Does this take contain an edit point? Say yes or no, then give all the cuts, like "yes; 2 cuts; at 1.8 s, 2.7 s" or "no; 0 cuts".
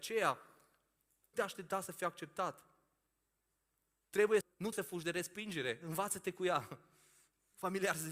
yes; 3 cuts; at 1.3 s, 4.4 s, 4.7 s